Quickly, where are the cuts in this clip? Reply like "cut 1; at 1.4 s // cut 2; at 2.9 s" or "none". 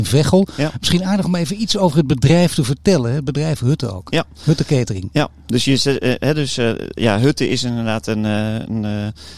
none